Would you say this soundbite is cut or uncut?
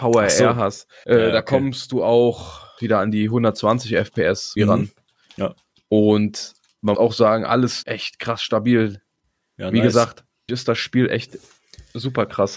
cut